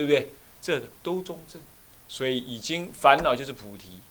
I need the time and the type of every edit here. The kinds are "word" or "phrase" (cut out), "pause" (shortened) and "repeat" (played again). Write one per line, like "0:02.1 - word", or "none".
0:01.8 - pause

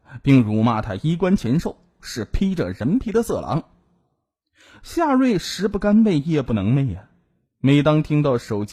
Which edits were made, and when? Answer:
none

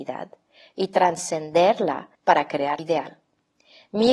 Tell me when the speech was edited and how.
0:02.1 - pause
0:02.8 - word

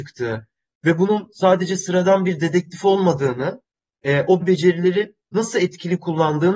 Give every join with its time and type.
0:04.4 - word

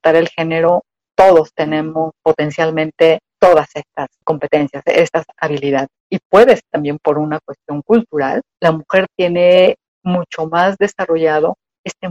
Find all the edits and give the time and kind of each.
0:06.6 - word

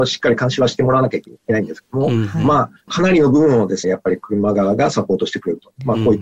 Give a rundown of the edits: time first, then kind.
0:03.8 - word

